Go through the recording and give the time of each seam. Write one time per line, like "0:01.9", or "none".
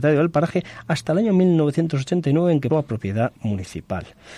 0:02.7